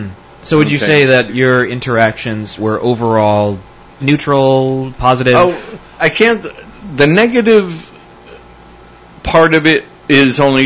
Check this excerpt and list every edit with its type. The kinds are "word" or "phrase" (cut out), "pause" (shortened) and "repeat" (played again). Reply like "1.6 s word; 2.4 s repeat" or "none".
1.3 s word; 2.6 s word; 4.0 s word; 6.0 s word